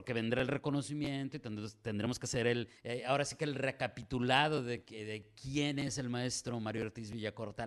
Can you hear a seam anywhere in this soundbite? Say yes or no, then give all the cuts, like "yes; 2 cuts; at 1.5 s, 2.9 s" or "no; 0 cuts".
yes; 1 cut; at 2.8 s